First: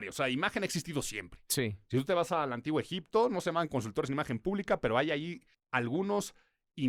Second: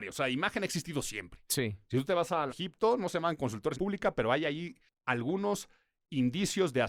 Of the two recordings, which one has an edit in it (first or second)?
second